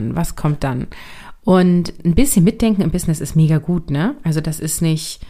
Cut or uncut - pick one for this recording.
cut